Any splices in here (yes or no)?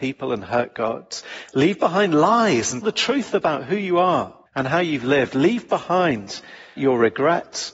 yes